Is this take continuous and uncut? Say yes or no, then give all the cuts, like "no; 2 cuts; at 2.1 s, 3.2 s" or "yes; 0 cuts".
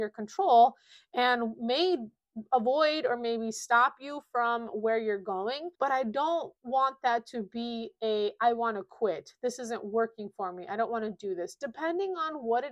no; 2 cuts; at 5.7 s, 6.6 s